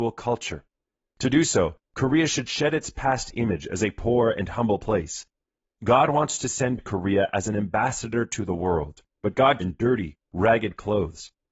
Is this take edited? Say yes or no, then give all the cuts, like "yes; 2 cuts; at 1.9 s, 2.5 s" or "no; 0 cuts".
yes; 1 cut; at 9.6 s